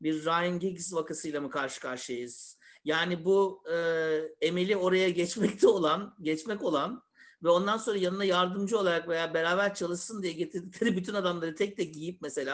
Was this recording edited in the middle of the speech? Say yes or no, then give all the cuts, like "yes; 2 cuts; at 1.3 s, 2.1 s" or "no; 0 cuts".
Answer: no; 0 cuts